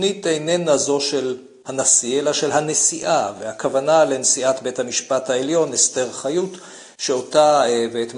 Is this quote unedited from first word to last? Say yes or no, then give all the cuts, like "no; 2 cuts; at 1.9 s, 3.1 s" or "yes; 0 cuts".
yes; 0 cuts